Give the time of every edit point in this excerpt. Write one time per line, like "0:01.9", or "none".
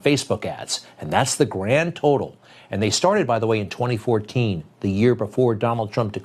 none

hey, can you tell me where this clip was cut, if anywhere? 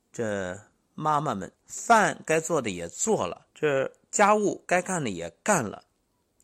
0:01.6
0:03.5

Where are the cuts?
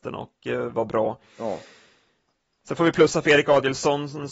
none

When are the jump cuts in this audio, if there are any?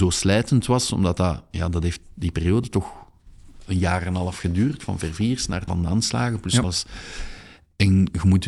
0:04.8
0:05.7
0:06.6

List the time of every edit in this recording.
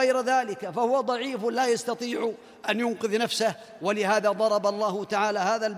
none

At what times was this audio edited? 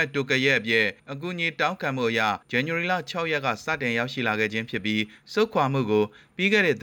0:01.0
0:02.4

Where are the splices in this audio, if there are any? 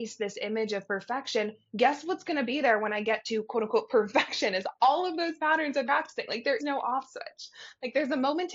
0:05.8
0:06.6

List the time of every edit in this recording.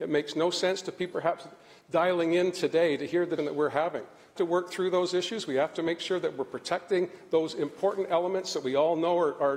0:01.1
0:03.4
0:04.4

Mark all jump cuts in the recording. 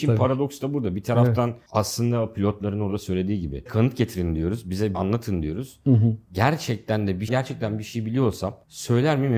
0:03.7
0:04.9
0:07.3

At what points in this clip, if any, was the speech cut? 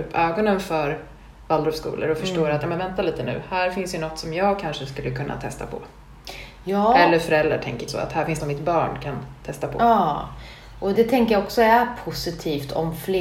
0:07.9
0:08.4
0:10.9

